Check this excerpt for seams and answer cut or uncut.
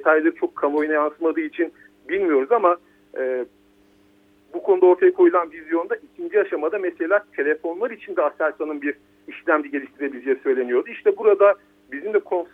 uncut